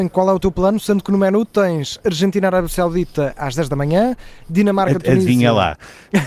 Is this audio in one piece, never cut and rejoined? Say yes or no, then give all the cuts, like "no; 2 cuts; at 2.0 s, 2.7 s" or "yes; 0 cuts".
yes; 0 cuts